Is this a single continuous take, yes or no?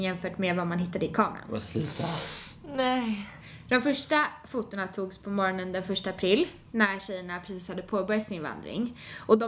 yes